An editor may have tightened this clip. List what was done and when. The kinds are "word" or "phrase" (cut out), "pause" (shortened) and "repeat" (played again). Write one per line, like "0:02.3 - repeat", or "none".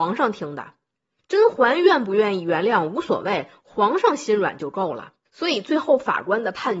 0:05.3 - pause